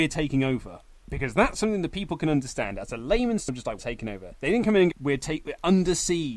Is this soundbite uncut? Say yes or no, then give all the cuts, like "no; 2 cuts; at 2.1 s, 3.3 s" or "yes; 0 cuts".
no; 3 cuts; at 3.5 s, 3.8 s, 4.9 s